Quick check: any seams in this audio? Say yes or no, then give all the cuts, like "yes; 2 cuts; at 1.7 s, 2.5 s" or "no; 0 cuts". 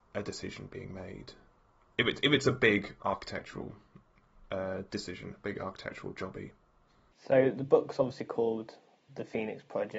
no; 0 cuts